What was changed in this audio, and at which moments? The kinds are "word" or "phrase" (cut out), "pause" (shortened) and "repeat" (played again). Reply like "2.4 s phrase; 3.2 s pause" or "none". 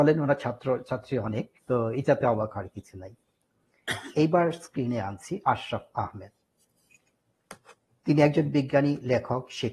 1.6 s pause; 4.1 s pause; 5.4 s pause